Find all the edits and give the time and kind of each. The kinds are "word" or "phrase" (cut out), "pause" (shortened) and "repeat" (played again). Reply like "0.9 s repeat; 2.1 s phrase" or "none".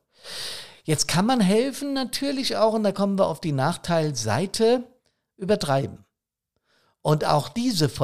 none